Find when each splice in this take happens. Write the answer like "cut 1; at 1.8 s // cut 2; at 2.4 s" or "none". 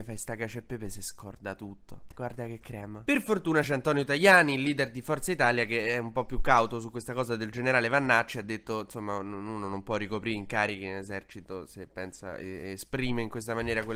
cut 1; at 2.1 s